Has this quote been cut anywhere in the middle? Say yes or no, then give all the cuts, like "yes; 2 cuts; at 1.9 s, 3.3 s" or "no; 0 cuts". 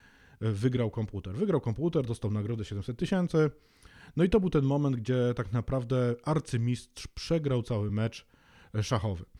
no; 0 cuts